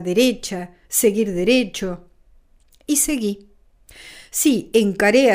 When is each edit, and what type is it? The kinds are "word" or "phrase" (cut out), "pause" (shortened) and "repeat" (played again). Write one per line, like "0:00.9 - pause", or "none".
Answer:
none